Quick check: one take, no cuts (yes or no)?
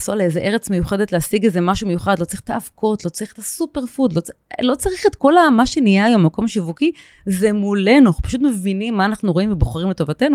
yes